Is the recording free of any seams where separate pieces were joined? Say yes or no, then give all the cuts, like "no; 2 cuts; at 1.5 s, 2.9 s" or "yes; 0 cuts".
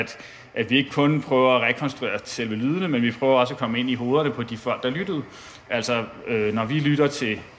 yes; 0 cuts